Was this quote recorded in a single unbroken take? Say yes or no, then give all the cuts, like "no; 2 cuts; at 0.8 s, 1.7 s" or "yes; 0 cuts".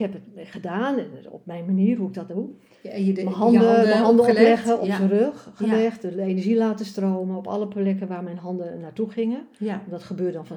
yes; 0 cuts